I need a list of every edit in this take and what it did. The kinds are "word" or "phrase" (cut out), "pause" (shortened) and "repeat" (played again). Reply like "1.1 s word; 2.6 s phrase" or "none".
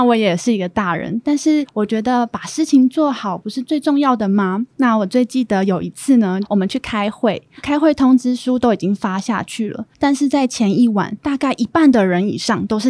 9.9 s pause